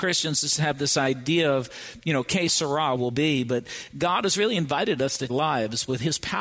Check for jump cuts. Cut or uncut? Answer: cut